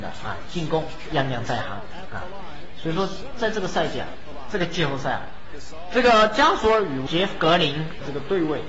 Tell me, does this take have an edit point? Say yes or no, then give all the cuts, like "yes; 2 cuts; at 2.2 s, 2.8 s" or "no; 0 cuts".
yes; 1 cut; at 1.1 s